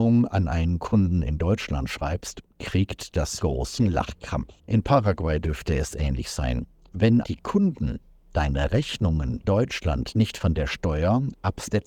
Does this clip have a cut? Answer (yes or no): yes